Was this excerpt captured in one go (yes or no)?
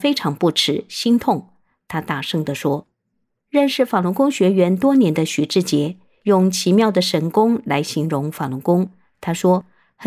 yes